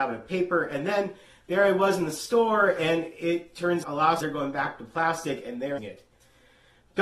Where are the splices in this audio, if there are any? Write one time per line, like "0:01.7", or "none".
0:03.8
0:04.2
0:05.8